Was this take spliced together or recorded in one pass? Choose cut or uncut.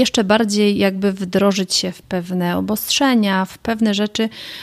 cut